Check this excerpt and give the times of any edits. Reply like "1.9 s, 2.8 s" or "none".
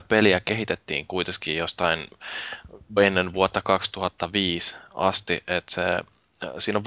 3.0 s